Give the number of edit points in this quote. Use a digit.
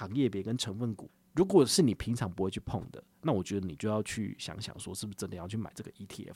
1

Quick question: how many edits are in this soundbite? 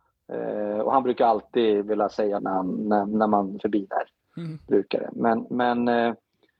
2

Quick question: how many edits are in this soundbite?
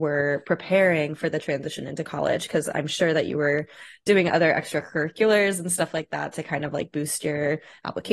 0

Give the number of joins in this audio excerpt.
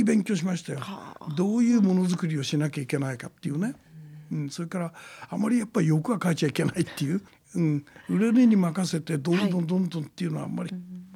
1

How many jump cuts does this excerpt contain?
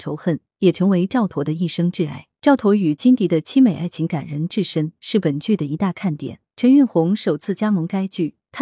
2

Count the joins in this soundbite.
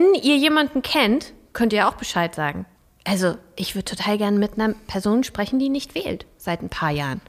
1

